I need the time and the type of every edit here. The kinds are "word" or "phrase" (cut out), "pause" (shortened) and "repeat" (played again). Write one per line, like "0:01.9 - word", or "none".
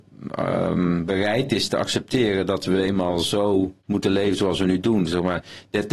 0:03.8 - pause